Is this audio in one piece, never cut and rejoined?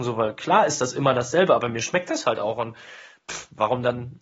yes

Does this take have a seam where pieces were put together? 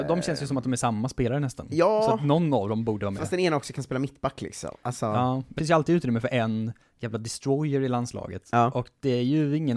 yes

